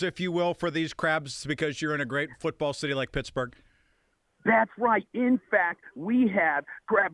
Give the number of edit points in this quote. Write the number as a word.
zero